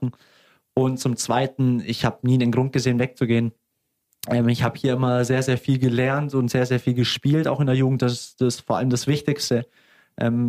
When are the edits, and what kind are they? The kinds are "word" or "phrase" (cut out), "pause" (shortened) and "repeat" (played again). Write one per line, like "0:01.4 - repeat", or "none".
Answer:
none